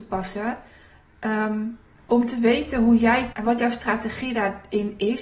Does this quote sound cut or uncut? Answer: cut